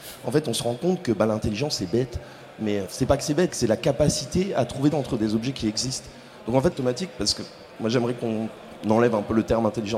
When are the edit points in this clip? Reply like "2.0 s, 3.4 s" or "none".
2.9 s, 3.5 s, 4.9 s, 6.7 s